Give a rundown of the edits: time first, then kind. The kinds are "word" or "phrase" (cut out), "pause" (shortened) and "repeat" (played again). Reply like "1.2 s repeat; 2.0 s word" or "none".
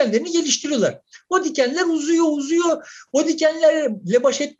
none

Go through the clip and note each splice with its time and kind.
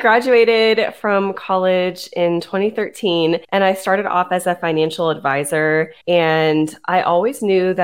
3.4 s pause; 6.0 s pause

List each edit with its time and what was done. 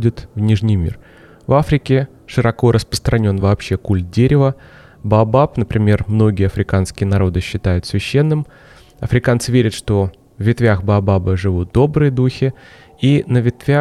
none

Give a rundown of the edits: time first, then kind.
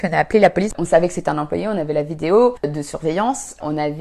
none

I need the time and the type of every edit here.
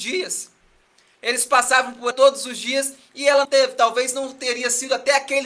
2.1 s word; 3.4 s word

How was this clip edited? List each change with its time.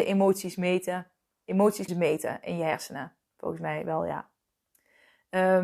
1.9 s word

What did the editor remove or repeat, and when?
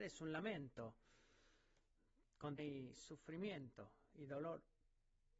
2.6 s word

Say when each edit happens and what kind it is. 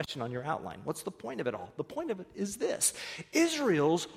none

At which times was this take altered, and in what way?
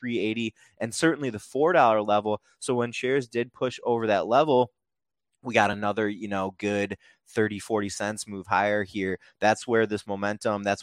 none

